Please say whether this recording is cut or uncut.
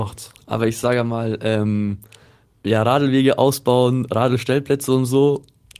uncut